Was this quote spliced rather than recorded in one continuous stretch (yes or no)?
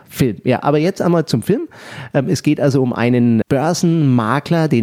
yes